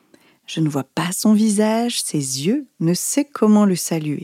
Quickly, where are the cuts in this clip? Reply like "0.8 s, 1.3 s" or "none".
none